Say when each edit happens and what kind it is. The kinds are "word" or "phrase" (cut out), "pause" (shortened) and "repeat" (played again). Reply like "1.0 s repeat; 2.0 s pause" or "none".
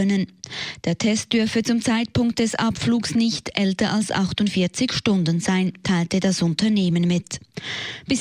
none